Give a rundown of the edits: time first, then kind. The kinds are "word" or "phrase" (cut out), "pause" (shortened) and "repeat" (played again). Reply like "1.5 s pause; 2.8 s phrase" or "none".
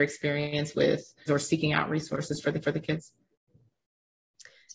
1.3 s word; 2.6 s repeat